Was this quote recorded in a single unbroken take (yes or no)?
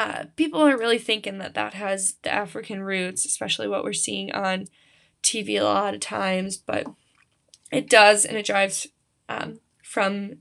yes